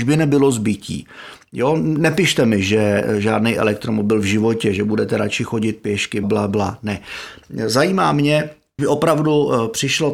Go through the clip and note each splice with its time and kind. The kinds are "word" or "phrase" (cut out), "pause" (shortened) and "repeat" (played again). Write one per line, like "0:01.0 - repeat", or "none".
0:06.2 - word
0:08.8 - word